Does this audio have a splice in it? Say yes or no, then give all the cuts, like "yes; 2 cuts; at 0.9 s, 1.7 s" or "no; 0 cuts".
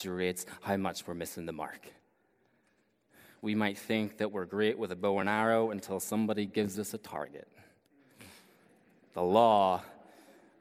no; 0 cuts